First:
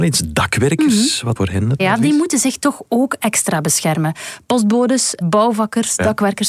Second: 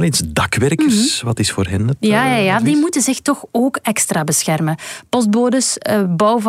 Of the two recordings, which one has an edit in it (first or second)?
first